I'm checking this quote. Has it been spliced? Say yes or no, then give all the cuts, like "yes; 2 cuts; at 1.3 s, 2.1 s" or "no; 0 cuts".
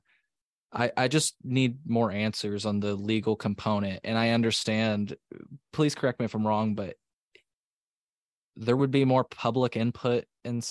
no; 0 cuts